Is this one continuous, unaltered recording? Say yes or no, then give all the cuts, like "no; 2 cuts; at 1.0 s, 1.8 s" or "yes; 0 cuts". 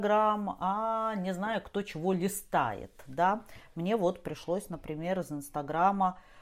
yes; 0 cuts